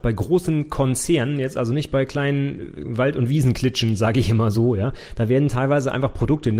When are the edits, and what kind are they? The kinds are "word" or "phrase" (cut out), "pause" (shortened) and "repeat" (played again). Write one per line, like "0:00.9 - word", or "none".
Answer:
none